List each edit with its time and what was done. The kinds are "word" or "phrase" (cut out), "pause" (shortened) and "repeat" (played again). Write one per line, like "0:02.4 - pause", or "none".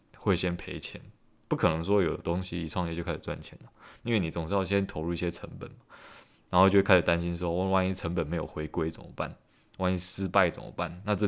none